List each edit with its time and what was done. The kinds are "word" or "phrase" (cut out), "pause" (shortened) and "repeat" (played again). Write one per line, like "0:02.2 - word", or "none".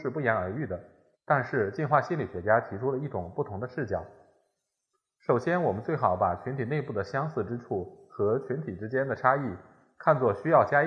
0:01.1 - pause